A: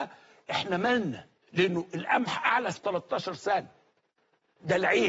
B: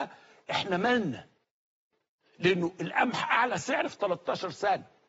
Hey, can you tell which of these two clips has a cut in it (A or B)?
A